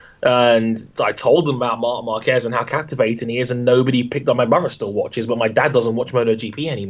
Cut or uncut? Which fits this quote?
cut